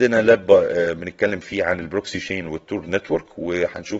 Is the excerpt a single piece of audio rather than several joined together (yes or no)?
yes